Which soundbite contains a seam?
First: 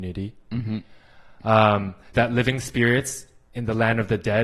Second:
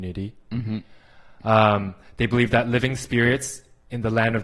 first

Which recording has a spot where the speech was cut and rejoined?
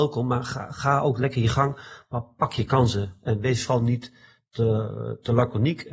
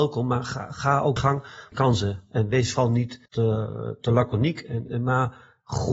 second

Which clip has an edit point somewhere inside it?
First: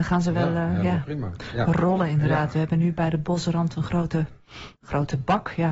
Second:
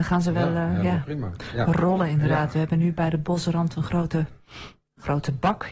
first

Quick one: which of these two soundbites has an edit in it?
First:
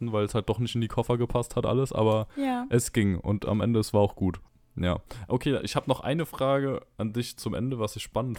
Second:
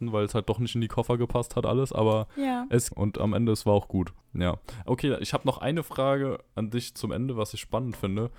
second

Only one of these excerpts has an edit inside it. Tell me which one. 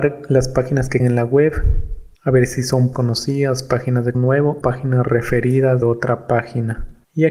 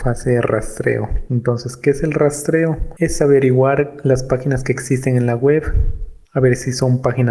first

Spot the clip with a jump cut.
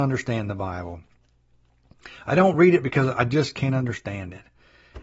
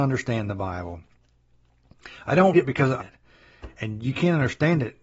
second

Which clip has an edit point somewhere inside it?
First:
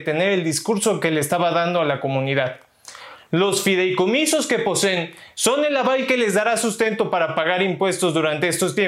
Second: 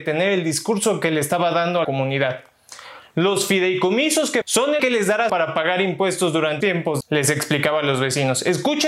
second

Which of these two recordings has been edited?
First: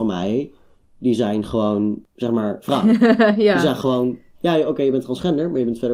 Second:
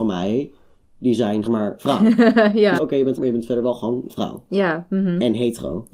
second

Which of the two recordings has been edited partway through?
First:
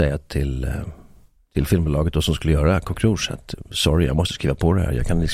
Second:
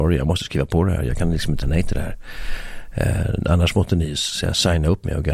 second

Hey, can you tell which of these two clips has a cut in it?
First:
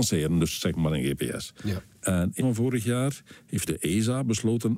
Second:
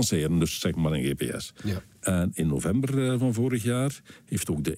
first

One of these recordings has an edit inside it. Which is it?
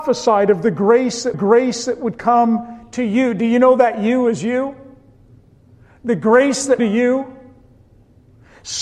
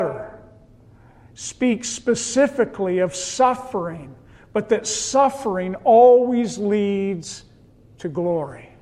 first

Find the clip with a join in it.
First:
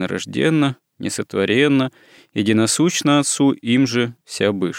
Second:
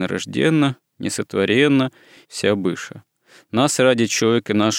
second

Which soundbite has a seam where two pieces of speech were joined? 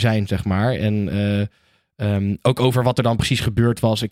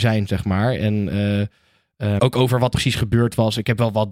second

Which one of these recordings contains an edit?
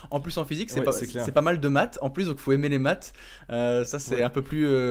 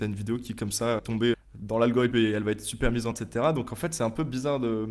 second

